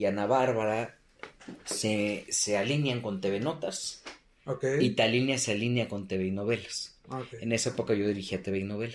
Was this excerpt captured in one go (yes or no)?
yes